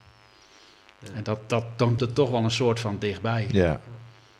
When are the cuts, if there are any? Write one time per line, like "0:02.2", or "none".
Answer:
0:02.0